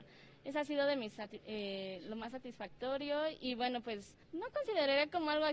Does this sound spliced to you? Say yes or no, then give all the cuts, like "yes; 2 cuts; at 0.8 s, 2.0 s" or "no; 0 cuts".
yes; 1 cut; at 4.2 s